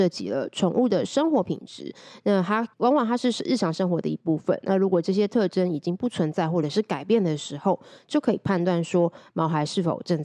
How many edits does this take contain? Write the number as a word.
one